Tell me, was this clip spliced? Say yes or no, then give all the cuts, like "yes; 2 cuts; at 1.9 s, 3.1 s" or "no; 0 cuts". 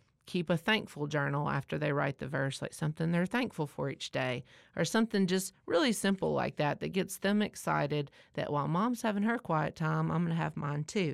no; 0 cuts